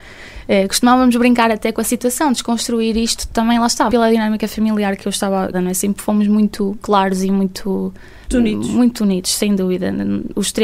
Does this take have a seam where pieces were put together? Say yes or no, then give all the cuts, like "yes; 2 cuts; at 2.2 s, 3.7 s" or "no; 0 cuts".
yes; 4 cuts; at 3.9 s, 5.5 s, 6.8 s, 8.2 s